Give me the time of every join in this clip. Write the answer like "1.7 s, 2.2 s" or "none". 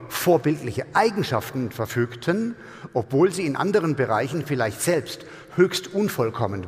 none